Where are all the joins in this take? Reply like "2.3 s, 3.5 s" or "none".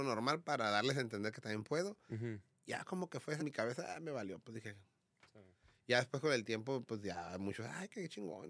3.4 s

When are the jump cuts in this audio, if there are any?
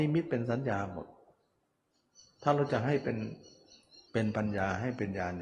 4.1 s

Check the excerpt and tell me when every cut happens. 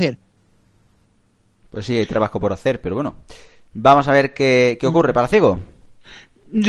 none

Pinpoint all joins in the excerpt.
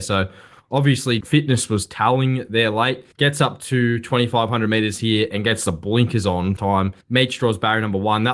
1.2 s, 3.1 s, 6.6 s, 7.0 s

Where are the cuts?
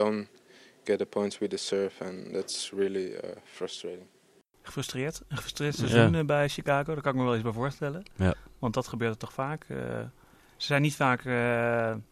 none

